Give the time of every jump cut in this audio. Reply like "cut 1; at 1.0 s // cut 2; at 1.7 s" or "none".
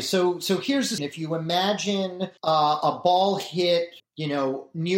cut 1; at 1.0 s // cut 2; at 2.4 s // cut 3; at 4.0 s